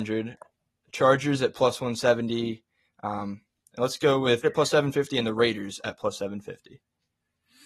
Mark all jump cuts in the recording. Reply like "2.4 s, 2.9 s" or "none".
4.4 s